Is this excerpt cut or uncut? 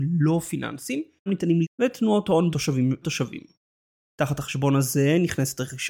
cut